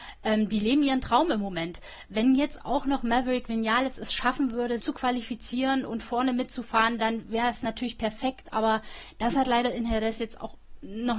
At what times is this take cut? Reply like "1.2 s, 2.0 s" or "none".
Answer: 4.8 s